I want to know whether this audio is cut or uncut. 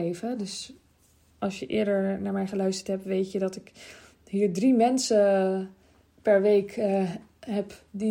uncut